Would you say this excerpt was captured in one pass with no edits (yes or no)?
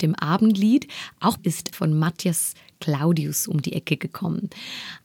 no